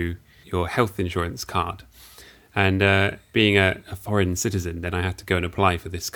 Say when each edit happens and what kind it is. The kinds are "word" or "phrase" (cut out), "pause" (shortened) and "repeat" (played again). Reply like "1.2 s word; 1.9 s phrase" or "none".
none